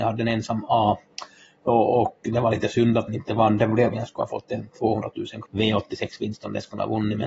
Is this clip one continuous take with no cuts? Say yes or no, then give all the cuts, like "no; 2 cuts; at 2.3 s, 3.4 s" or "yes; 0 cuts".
no; 3 cuts; at 3.1 s, 3.9 s, 5.4 s